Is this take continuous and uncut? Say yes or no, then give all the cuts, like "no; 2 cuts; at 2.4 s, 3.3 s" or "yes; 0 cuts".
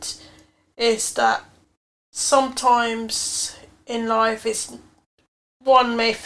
yes; 0 cuts